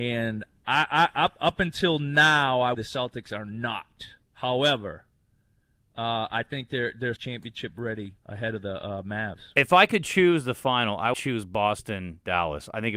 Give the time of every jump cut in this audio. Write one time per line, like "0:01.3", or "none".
0:02.7
0:04.2
0:07.2
0:08.2
0:11.1